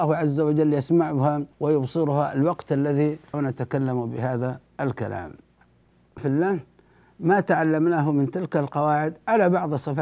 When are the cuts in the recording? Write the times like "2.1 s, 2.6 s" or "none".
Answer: 1.5 s, 3.3 s, 6.2 s